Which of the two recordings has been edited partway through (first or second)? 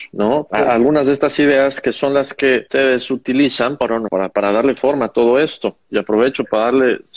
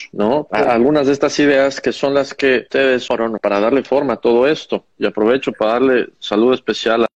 second